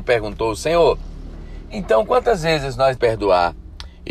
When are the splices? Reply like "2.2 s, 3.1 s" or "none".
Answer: 3.0 s